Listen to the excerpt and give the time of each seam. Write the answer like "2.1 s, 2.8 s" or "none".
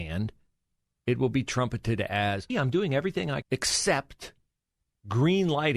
2.5 s, 3.4 s

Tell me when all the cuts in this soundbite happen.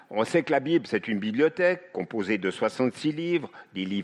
none

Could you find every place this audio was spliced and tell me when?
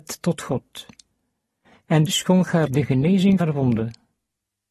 2.1 s, 2.7 s, 3.4 s

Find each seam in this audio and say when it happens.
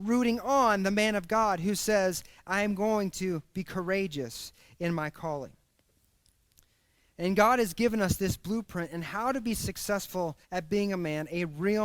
10.4 s

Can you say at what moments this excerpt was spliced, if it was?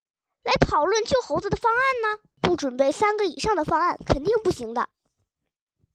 2.3 s

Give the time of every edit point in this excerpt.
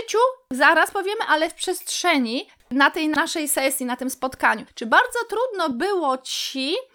none

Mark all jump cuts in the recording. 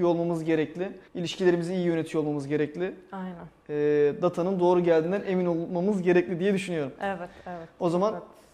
1.1 s

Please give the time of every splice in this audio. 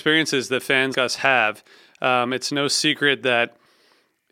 0.9 s

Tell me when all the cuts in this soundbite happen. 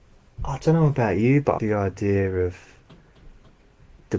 1.6 s

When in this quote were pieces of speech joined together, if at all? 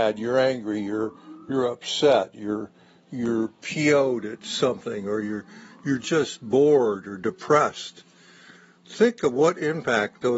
none

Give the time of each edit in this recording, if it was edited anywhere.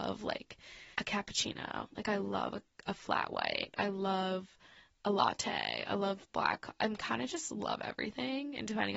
0.9 s

